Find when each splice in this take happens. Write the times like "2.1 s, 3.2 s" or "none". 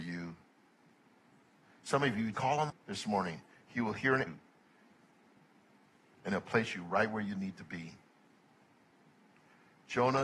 2.3 s, 2.7 s, 4.3 s